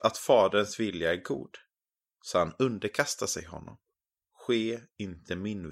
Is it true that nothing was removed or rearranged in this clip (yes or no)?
no